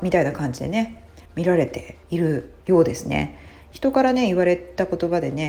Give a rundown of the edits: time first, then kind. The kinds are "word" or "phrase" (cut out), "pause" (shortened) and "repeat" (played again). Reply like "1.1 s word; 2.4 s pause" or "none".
1.3 s pause; 2.0 s pause; 2.6 s pause